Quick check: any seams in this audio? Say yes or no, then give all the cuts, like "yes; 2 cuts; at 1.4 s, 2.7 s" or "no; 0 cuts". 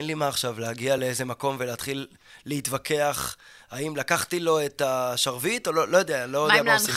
no; 0 cuts